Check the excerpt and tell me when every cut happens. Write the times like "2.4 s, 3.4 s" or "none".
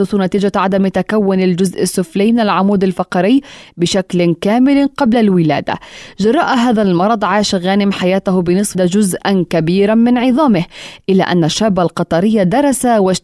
8.7 s